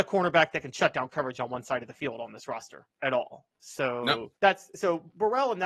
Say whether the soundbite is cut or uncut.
cut